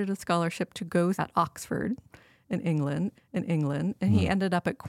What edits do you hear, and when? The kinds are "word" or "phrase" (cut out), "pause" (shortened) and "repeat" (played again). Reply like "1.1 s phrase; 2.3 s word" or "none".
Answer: 1.1 s word; 3.1 s repeat